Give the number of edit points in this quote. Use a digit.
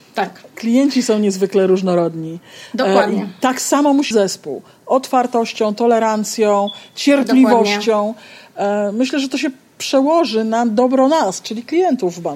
1